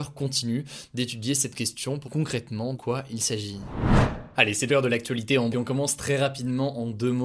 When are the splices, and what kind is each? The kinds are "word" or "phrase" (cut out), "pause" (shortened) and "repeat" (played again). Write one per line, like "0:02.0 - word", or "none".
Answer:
0:02.0 - word
0:02.7 - word
0:04.7 - word
0:05.5 - word